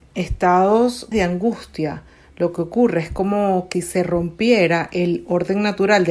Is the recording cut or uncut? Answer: cut